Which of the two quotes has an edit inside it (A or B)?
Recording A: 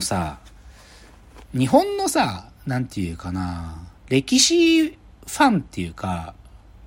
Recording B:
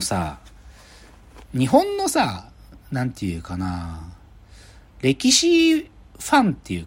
A